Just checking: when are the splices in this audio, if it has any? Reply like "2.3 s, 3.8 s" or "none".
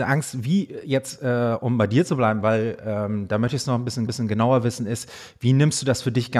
4.1 s